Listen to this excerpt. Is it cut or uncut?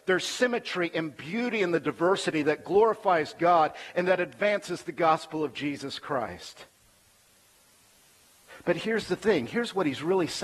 uncut